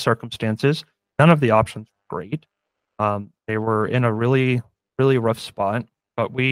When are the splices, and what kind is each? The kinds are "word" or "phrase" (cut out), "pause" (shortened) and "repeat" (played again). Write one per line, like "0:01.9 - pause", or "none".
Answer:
0:03.4 - pause